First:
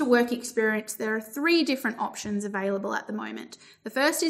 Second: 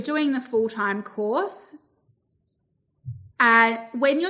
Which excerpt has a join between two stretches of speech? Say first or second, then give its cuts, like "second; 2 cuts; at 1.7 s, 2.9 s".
second; 1 cut; at 3.3 s